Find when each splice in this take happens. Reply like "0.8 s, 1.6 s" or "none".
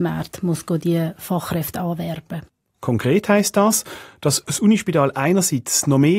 none